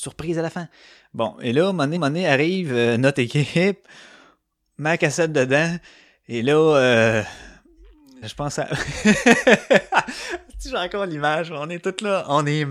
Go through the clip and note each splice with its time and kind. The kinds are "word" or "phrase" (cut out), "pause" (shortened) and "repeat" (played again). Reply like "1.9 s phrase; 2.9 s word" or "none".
2.0 s repeat; 8.2 s word